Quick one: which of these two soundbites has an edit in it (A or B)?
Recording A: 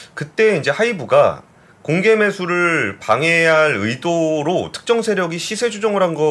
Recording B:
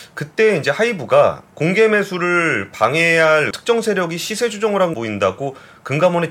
B